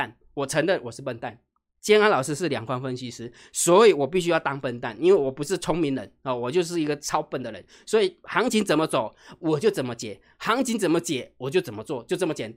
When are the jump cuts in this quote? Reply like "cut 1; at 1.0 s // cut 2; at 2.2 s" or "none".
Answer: none